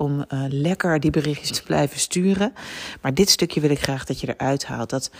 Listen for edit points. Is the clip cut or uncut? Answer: cut